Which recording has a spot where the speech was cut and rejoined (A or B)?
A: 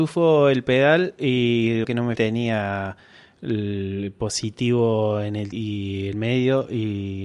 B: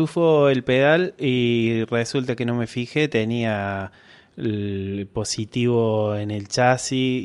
A